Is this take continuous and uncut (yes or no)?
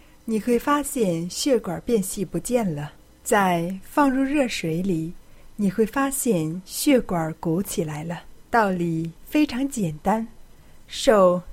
no